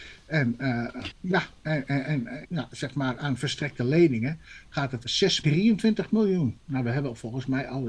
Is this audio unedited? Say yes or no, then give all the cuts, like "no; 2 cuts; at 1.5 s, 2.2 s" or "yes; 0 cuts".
no; 5 cuts; at 1.1 s, 1.6 s, 2.4 s, 5.0 s, 5.4 s